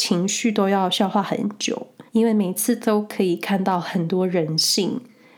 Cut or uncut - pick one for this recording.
cut